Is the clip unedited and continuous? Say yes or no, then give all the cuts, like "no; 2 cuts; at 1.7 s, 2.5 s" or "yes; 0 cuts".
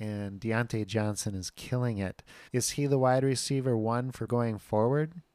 no; 2 cuts; at 2.5 s, 4.3 s